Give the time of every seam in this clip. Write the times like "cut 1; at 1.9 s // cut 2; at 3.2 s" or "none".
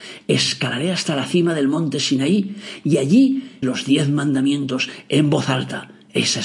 cut 1; at 3.6 s